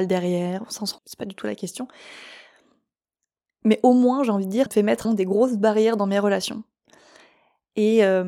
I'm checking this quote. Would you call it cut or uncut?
cut